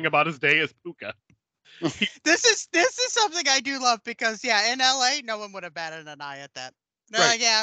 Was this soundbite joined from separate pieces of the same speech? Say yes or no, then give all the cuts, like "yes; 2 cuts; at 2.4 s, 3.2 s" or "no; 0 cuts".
yes; 1 cut; at 1.2 s